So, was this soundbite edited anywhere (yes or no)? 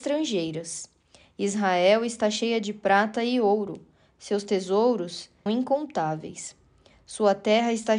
yes